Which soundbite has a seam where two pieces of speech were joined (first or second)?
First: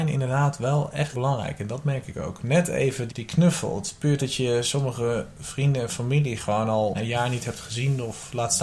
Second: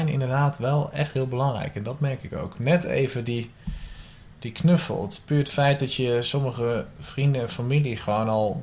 first